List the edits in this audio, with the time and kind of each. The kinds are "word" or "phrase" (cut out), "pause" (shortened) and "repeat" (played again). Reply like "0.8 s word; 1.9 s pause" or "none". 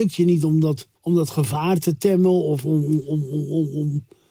1.0 s pause